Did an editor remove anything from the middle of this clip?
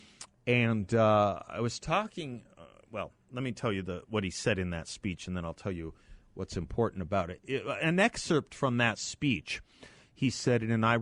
no; 0 cuts

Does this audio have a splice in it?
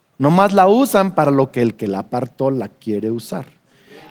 no; 0 cuts

